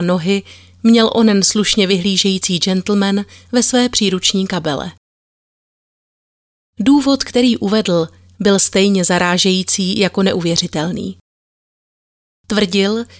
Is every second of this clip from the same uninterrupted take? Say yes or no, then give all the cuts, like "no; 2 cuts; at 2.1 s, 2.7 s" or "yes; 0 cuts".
yes; 0 cuts